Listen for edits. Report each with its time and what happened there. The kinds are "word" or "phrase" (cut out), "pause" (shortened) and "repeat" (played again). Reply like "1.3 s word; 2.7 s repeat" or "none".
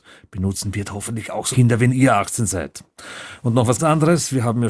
1.5 s word; 3.8 s word